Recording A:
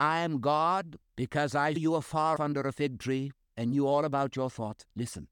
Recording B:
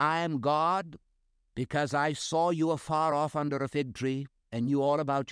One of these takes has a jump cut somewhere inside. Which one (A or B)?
A